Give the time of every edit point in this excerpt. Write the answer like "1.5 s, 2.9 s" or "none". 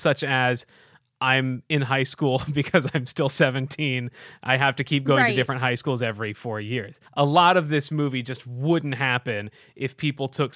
7.1 s

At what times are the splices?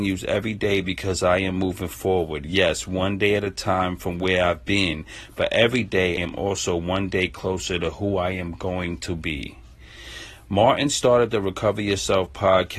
6.2 s

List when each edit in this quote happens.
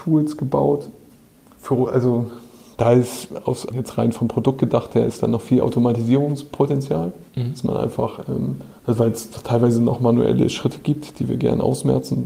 1.1 s, 3.7 s, 7.3 s, 8.8 s

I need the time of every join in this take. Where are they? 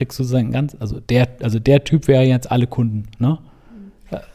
1.0 s, 3.1 s

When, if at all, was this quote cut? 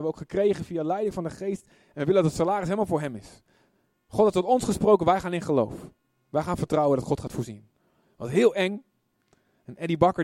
none

